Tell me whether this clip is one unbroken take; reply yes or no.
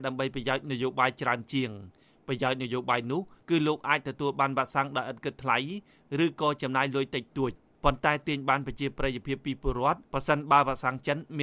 no